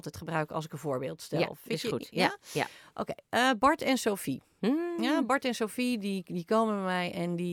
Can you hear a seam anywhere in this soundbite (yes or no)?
no